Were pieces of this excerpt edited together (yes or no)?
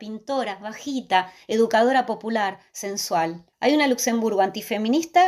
yes